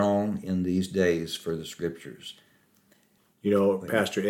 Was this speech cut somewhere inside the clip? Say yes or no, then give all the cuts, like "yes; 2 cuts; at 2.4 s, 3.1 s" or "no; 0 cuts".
no; 0 cuts